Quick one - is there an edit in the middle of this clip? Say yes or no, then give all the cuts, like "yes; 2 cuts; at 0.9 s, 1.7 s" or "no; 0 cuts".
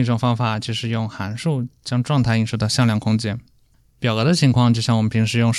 no; 0 cuts